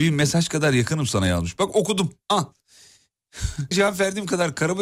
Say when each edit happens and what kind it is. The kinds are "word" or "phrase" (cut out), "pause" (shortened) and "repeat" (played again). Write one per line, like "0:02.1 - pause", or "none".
0:03.7 - word